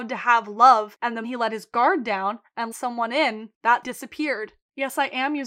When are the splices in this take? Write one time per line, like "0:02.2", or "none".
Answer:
0:01.2
0:02.7
0:03.8